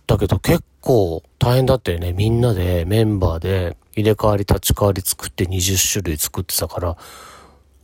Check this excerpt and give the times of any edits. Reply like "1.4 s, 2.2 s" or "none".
1.3 s, 3.9 s